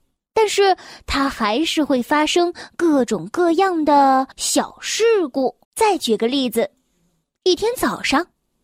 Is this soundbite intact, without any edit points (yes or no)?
no